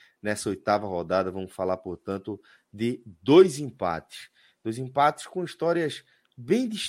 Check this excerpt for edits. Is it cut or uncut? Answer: uncut